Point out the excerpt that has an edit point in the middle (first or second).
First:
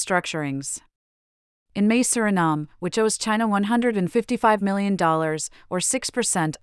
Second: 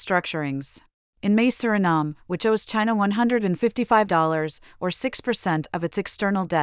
second